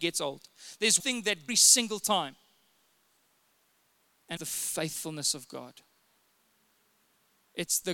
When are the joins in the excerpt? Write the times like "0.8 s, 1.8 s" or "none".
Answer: 1.0 s, 1.5 s, 4.4 s